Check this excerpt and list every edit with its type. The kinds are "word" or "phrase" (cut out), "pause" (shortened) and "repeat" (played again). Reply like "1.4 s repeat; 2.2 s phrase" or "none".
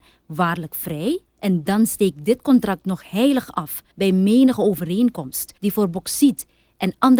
1.3 s pause; 3.9 s pause; 5.6 s pause